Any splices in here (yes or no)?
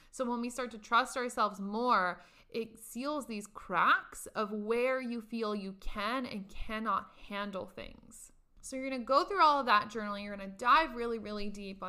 no